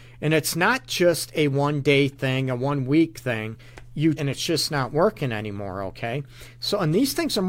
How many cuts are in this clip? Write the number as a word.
one